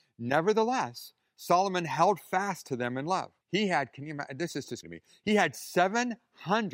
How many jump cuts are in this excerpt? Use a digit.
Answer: 2